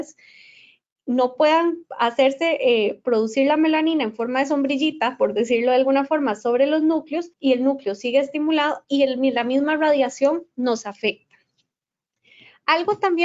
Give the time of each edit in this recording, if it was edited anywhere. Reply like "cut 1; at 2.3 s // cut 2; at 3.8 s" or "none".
cut 1; at 7.3 s